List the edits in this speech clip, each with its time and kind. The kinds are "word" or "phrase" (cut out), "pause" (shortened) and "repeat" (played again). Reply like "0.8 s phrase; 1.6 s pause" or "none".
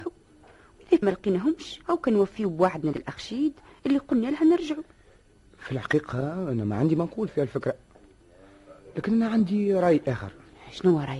1.0 s word; 1.8 s pause; 2.9 s word